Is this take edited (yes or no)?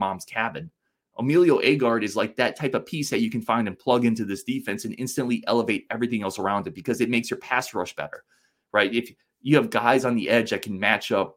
no